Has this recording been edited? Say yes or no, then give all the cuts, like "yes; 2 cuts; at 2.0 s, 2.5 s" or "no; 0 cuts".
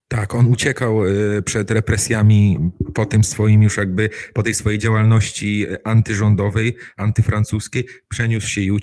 no; 0 cuts